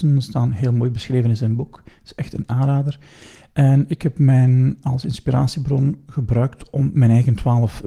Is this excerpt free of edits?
yes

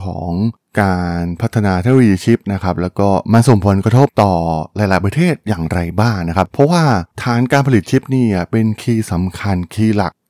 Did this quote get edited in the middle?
yes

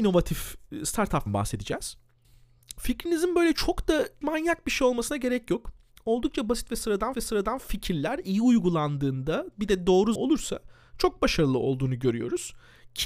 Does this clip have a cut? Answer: yes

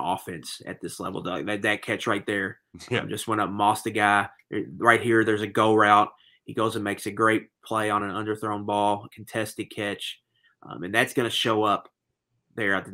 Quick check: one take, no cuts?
yes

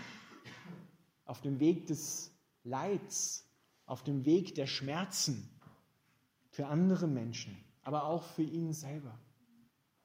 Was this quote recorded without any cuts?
yes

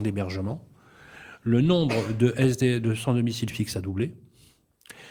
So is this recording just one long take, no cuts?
yes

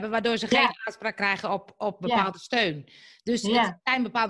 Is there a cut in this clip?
no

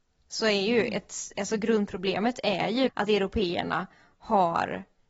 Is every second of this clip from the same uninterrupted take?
no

